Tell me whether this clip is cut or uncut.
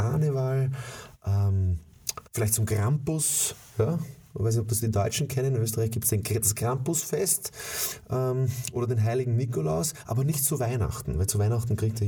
cut